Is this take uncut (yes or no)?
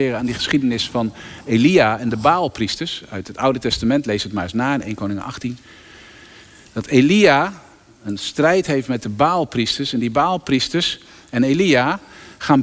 yes